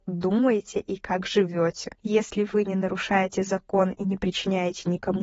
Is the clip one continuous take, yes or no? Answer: yes